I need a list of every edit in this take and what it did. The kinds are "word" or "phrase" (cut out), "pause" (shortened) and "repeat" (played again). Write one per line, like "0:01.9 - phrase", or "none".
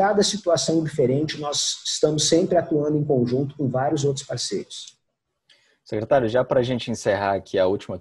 none